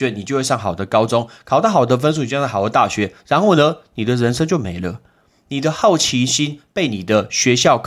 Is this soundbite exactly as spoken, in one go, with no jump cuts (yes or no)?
yes